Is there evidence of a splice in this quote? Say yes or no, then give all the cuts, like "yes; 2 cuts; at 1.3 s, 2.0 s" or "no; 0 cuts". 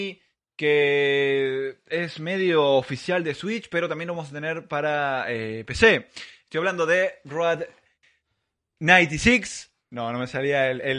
no; 0 cuts